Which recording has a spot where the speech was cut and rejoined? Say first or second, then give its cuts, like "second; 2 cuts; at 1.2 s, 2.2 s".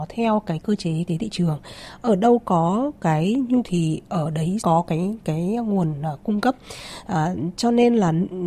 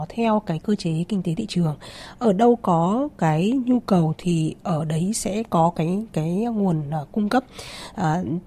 first; 3 cuts; at 1.1 s, 3.6 s, 4.6 s